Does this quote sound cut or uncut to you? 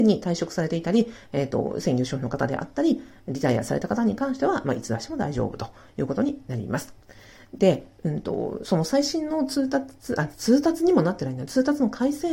uncut